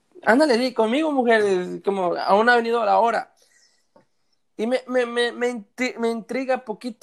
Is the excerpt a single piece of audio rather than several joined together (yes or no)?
yes